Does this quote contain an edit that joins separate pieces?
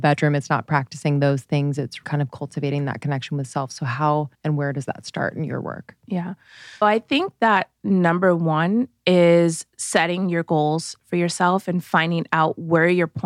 yes; 3 cuts; at 2.0 s, 4.3 s, 6.8 s

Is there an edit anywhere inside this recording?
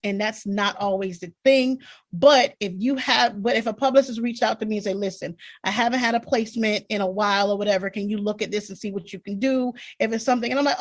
no; 0 cuts

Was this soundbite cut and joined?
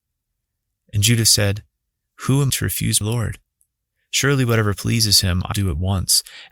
yes; 3 cuts; at 2.5 s, 3.0 s, 5.5 s

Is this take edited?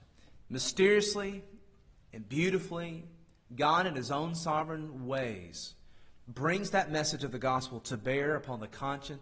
no; 0 cuts

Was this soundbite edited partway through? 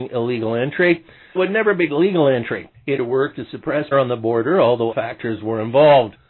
yes; 5 cuts; at 1.4 s, 1.9 s, 3.0 s, 3.9 s, 4.9 s

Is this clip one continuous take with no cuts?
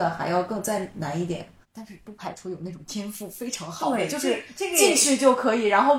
no; 1 cut; at 1.6 s

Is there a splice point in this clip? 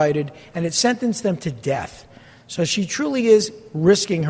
no; 0 cuts

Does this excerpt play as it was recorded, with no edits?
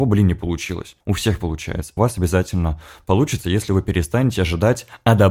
no; 2 cuts; at 1.0 s, 2.0 s

